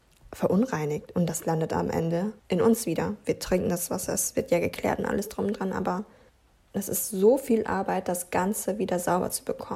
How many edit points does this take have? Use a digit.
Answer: 2